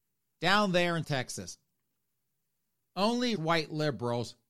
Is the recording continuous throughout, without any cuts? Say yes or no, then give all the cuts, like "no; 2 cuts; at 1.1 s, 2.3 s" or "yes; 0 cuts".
no; 2 cuts; at 1.0 s, 3.4 s